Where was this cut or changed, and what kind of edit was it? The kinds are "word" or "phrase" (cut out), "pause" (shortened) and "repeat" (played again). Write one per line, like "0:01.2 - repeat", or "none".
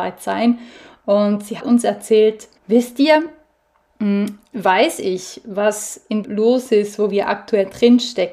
0:01.6 - word
0:02.6 - pause
0:04.5 - word
0:06.2 - phrase